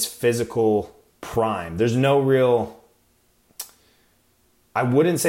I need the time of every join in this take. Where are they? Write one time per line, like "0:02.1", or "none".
none